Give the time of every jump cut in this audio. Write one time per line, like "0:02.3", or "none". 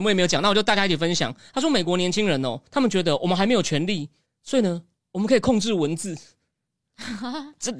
0:02.7